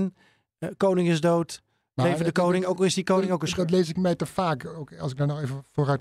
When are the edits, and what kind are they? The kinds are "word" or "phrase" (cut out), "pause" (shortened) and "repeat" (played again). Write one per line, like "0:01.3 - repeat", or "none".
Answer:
none